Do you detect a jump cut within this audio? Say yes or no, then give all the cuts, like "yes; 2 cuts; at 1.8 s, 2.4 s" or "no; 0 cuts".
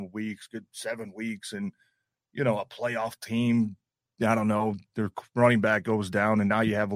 no; 0 cuts